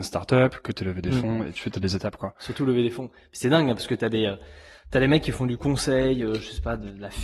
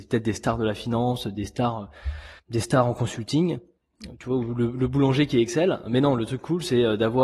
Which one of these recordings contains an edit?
second; 1 cut; at 2.4 s

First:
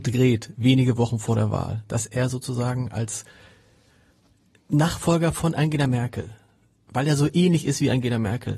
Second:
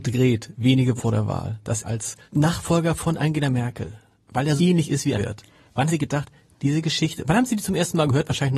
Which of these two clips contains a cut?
second; 7 cuts; at 1.0 s, 1.8 s, 2.3 s, 4.1 s, 4.6 s, 5.1 s, 5.9 s

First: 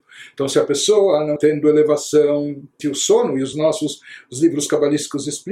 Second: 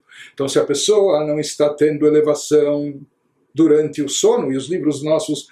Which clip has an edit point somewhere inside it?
first; 3 cuts; at 1.4 s, 2.8 s, 3.5 s

